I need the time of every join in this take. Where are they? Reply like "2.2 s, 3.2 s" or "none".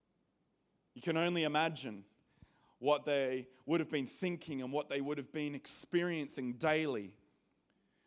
none